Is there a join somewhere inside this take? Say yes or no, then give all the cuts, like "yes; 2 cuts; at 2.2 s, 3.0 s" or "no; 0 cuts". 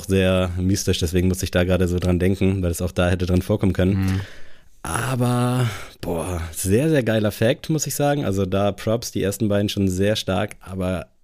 no; 0 cuts